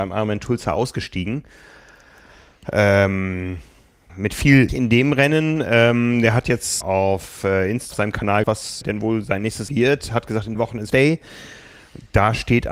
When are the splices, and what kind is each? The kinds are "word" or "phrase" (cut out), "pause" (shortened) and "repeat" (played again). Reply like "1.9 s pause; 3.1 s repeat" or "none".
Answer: 4.1 s word; 4.7 s word; 6.8 s word; 7.9 s word; 8.4 s word; 8.8 s word; 9.7 s word; 10.5 s word; 10.9 s word